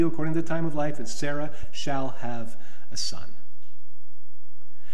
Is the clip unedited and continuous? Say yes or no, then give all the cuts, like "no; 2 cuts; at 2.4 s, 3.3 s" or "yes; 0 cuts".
yes; 0 cuts